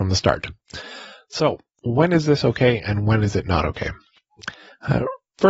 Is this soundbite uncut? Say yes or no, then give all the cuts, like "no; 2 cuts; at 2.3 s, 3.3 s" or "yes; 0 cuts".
yes; 0 cuts